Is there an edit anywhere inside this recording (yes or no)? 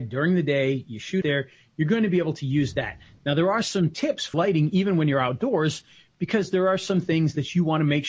yes